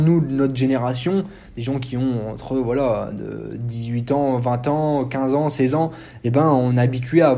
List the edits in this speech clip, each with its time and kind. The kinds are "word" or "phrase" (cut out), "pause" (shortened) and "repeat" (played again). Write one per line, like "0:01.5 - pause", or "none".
none